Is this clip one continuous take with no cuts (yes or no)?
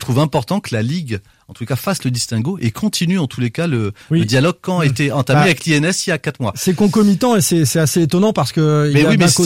yes